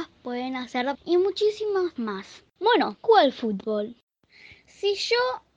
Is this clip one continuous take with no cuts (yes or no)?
no